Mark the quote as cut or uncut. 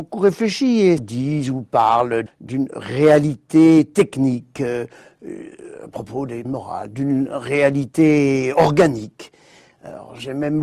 cut